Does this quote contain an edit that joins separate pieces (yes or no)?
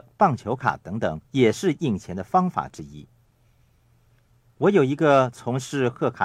yes